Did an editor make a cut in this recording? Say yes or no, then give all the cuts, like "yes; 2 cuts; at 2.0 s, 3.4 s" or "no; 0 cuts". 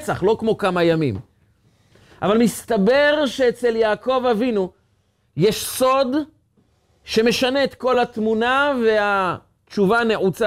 no; 0 cuts